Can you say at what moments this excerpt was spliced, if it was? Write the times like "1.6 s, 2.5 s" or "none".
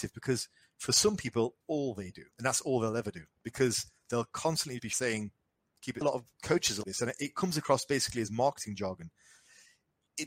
1.6 s, 2.3 s, 3.3 s, 4.8 s, 6.0 s, 6.8 s